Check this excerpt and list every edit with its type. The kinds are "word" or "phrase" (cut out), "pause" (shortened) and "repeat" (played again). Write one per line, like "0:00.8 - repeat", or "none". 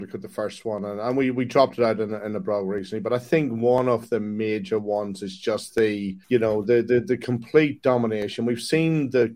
0:06.2 - pause